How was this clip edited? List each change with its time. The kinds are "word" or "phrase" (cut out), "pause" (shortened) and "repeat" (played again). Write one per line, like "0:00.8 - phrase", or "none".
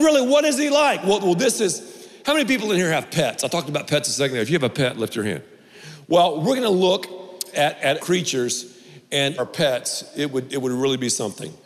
0:08.0 - phrase
0:09.4 - phrase

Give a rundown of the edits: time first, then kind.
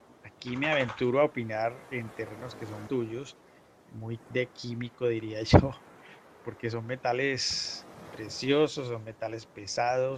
0:02.9 - word
0:04.3 - word

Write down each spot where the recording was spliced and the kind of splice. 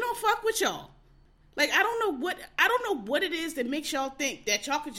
none

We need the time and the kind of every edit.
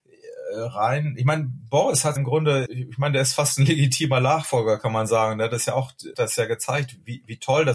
0:02.2 - word
0:02.7 - word
0:06.1 - word

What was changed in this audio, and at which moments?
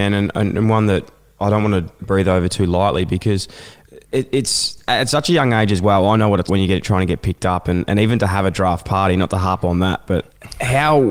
0:02.0 - phrase
0:04.0 - pause
0:06.5 - word

